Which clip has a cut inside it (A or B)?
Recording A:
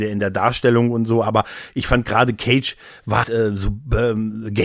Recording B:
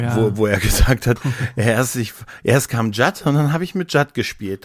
A